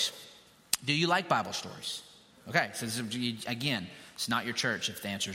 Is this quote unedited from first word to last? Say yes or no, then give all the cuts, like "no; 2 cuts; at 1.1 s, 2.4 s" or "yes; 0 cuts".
yes; 0 cuts